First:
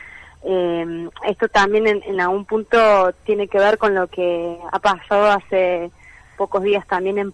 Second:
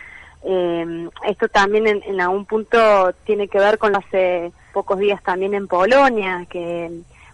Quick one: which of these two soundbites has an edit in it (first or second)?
second